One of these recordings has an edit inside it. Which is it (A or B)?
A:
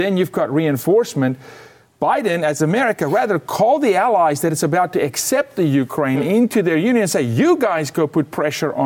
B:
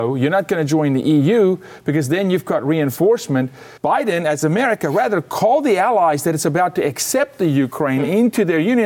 B